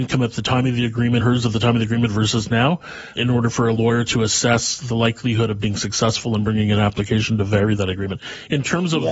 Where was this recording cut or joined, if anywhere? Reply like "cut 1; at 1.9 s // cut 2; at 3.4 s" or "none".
cut 1; at 1.2 s // cut 2; at 3.2 s

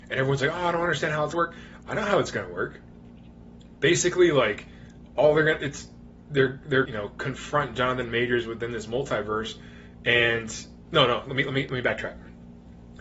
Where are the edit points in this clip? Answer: cut 1; at 1.3 s // cut 2; at 6.9 s // cut 3; at 10.9 s

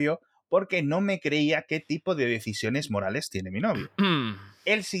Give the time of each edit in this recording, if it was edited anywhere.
none

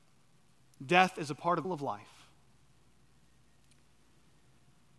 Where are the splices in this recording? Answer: cut 1; at 1.6 s

